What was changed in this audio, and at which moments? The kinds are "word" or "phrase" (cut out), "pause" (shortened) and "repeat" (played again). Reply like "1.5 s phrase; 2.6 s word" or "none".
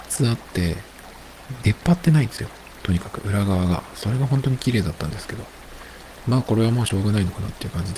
none